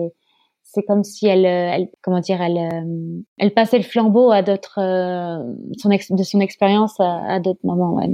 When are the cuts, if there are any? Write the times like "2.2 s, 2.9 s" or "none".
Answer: 2.0 s, 3.3 s